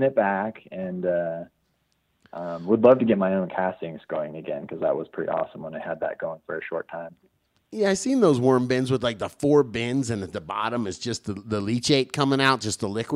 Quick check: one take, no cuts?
yes; 0 cuts

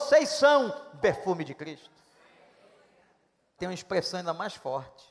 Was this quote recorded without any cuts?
no; 2 cuts; at 1.0 s, 3.6 s

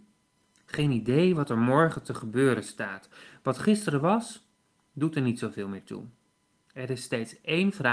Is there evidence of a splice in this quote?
no; 0 cuts

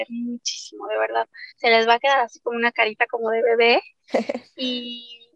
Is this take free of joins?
no; 1 cut; at 1.5 s

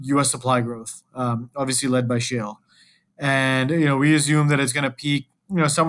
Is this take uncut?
yes; 0 cuts

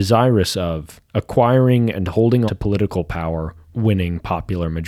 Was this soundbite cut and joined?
yes; 3 cuts; at 1.1 s, 2.5 s, 3.7 s

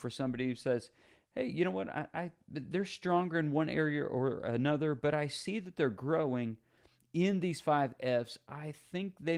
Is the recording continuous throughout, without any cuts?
yes; 0 cuts

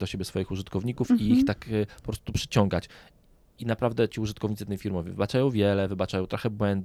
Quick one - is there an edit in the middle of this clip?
no; 0 cuts

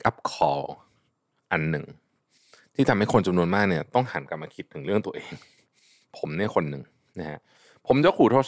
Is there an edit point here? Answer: no; 0 cuts

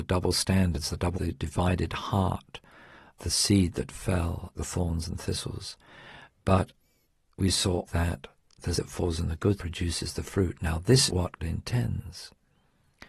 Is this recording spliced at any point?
yes; 8 cuts; at 1.1 s, 3.2 s, 4.6 s, 7.9 s, 8.7 s, 9.6 s, 11.1 s, 11.4 s

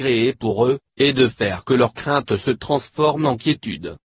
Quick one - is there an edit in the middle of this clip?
no; 0 cuts

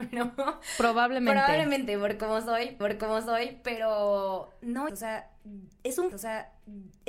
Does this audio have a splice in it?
yes; 3 cuts; at 2.8 s, 4.9 s, 6.1 s

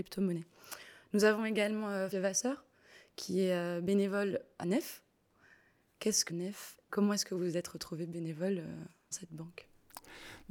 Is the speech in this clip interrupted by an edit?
yes; 5 cuts; at 2.1 s, 4.6 s, 6.3 s, 6.9 s, 9.1 s

